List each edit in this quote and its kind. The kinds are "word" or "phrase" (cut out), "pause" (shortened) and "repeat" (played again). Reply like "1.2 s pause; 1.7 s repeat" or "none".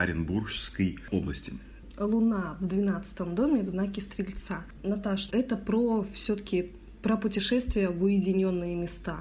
5.3 s word